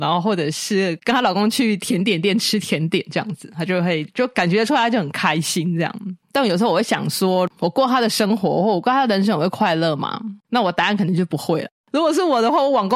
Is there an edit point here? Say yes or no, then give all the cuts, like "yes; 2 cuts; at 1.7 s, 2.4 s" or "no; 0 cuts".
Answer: yes; 2 cuts; at 6.2 s, 10.4 s